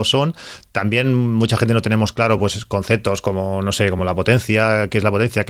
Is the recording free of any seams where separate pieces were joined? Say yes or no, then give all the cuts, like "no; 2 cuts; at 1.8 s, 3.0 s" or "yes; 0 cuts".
yes; 0 cuts